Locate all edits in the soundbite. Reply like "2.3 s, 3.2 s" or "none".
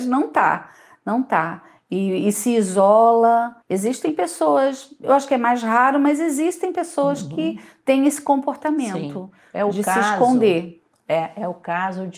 3.6 s